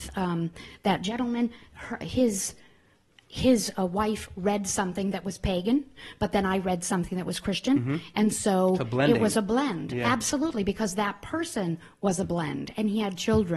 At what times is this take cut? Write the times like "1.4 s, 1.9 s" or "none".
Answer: 2.0 s